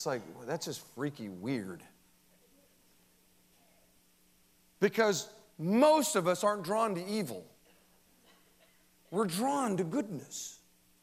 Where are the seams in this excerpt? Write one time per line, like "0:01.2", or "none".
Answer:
none